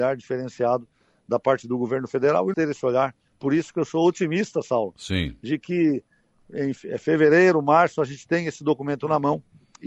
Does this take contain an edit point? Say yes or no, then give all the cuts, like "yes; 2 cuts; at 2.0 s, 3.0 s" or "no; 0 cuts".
yes; 1 cut; at 2.5 s